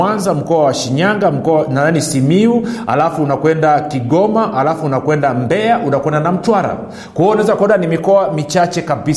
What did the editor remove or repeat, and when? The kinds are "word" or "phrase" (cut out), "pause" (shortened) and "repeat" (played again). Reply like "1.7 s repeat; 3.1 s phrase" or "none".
none